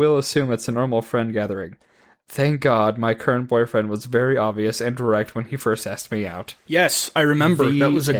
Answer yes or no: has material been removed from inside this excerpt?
no